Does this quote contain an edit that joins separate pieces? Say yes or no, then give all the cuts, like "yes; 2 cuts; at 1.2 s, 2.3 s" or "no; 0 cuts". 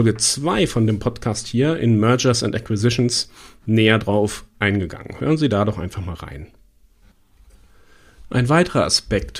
no; 0 cuts